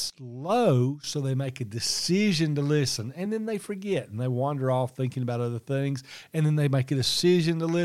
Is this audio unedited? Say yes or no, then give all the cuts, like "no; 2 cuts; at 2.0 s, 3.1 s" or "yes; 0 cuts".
yes; 0 cuts